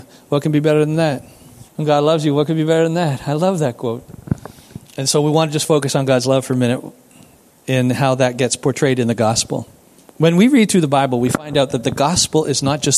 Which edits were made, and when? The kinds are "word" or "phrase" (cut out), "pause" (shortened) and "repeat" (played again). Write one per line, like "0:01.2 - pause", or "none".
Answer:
0:01.7 - pause